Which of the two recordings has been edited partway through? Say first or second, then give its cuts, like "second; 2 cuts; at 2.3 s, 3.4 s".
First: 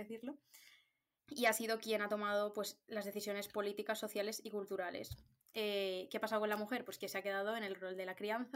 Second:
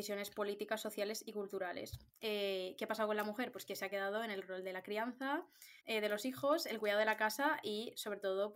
second; 2 cuts; at 2.1 s, 5.8 s